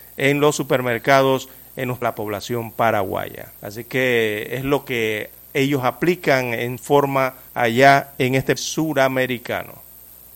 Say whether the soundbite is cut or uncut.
cut